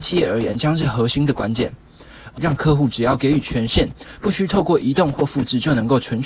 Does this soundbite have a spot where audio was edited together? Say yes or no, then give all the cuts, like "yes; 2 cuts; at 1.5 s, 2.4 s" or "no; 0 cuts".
yes; 1 cut; at 2.4 s